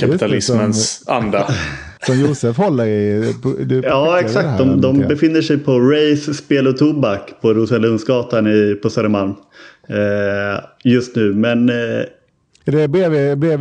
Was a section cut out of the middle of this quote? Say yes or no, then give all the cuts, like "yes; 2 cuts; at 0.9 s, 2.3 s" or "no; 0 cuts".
yes; 1 cut; at 2.0 s